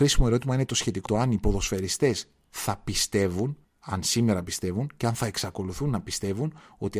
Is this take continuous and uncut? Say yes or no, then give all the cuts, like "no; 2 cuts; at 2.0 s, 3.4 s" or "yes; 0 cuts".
no; 2 cuts; at 1.1 s, 3.6 s